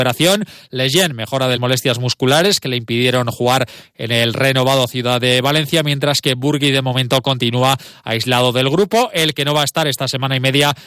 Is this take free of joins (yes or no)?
no